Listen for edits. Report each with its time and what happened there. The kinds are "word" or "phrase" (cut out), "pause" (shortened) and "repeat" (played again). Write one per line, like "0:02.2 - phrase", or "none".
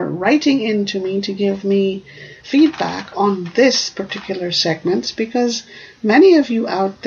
0:02.4 - word